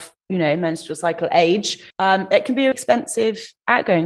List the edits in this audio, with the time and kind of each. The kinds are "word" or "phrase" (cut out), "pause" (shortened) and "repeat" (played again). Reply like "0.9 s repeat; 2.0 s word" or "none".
1.9 s pause; 2.7 s word